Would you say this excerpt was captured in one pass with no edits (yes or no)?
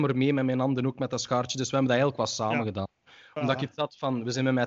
yes